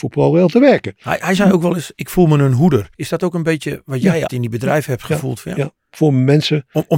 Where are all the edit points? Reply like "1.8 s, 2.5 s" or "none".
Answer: 1.9 s, 2.9 s, 4.3 s